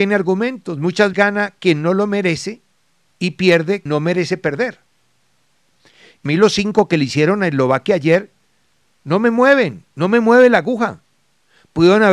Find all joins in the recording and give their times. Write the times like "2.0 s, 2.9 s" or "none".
1.1 s, 3.9 s, 6.3 s